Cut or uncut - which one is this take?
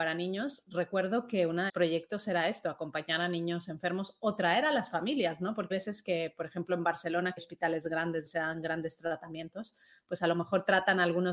cut